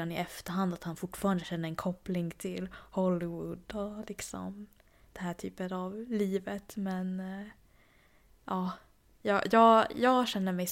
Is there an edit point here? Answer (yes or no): no